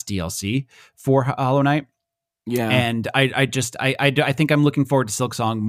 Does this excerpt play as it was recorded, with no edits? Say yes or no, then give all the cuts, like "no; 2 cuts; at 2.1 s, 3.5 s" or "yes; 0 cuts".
yes; 0 cuts